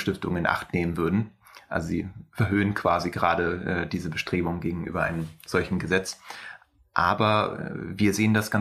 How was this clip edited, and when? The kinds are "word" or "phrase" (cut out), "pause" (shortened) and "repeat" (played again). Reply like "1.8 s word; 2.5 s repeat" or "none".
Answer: none